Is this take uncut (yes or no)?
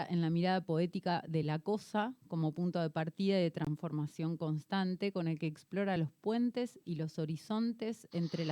yes